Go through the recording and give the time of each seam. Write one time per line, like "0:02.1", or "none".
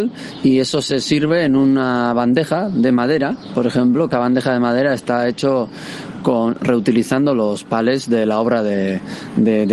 0:04.1